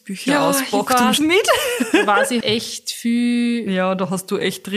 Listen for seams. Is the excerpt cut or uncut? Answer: cut